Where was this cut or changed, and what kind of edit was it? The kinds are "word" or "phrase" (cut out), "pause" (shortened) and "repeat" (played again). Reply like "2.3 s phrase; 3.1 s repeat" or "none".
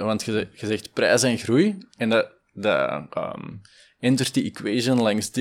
none